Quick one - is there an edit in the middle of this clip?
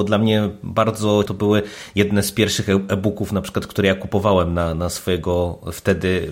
yes; 1 cut; at 1.3 s

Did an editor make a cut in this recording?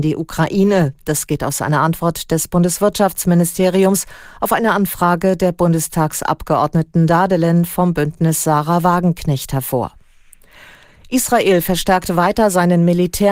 no; 0 cuts

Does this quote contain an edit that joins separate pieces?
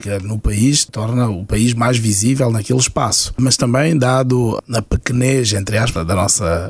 no; 0 cuts

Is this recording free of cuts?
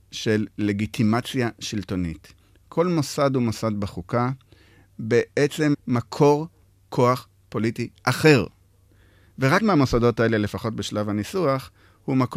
no; 2 cuts; at 5.7 s, 9.6 s

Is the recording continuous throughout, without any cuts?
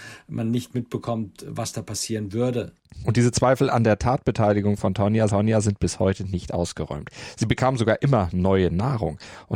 no; 1 cut; at 5.3 s

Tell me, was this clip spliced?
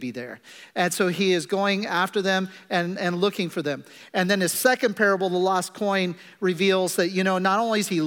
no; 0 cuts

